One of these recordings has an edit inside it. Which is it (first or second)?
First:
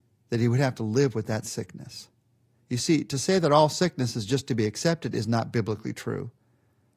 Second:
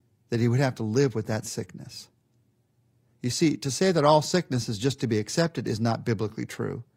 first